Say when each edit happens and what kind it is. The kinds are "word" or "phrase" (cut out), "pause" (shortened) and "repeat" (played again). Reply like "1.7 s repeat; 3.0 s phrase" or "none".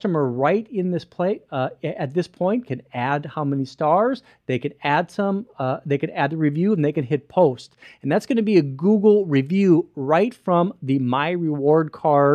none